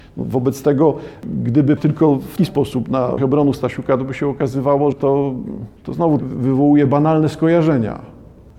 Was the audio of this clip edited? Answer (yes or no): yes